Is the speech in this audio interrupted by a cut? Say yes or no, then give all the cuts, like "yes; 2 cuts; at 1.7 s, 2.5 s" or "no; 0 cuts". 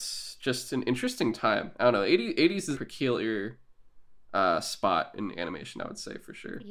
yes; 1 cut; at 2.7 s